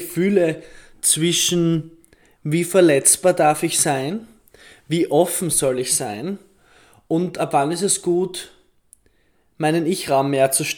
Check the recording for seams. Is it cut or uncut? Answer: uncut